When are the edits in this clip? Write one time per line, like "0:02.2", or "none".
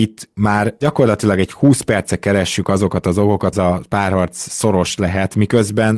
0:03.5